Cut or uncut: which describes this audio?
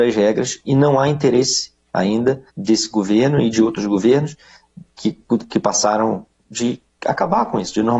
cut